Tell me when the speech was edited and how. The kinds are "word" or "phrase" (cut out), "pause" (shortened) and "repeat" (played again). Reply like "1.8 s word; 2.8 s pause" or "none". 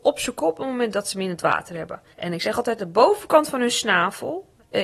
2.1 s pause